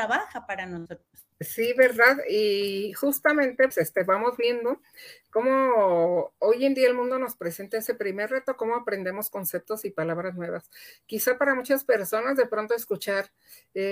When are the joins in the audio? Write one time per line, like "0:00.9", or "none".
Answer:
0:01.3
0:03.7